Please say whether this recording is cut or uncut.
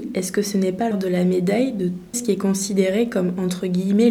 cut